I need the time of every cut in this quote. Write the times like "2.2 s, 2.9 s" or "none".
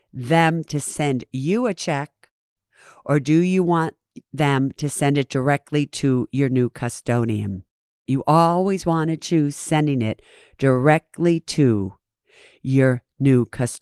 none